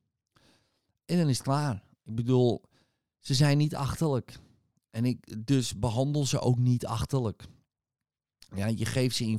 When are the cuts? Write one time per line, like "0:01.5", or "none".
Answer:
none